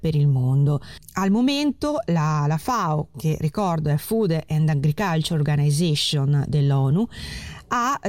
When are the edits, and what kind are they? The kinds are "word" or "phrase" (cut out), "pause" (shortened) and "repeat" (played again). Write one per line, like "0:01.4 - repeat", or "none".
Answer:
none